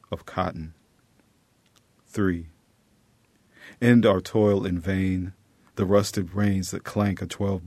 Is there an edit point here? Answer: no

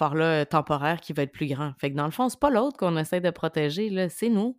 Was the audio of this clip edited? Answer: no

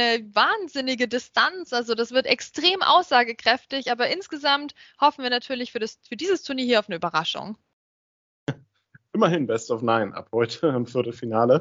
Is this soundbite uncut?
yes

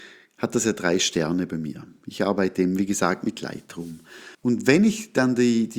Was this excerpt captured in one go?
no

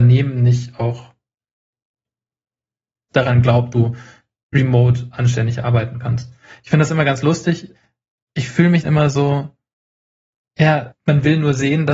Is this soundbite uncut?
no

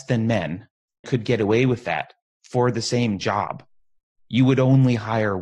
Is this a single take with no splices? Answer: no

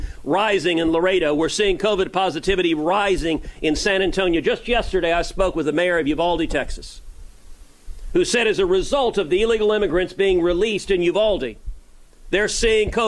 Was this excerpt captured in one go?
yes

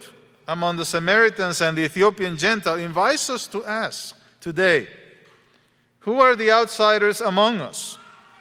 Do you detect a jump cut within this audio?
no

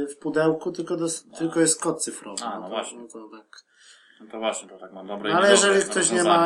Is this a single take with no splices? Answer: yes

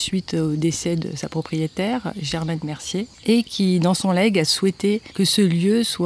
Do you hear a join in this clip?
no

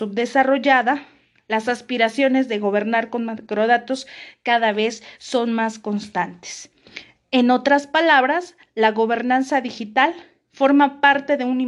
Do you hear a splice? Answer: no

